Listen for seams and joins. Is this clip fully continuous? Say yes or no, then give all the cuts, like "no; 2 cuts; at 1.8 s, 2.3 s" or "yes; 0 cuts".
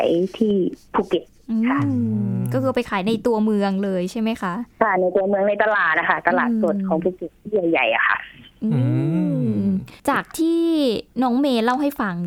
no; 2 cuts; at 10.0 s, 11.1 s